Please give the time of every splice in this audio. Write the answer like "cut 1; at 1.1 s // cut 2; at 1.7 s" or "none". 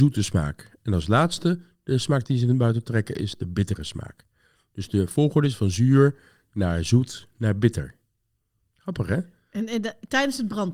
none